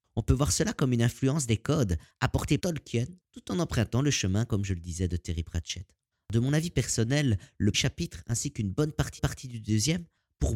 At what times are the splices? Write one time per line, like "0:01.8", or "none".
0:02.6
0:06.1
0:07.7
0:09.2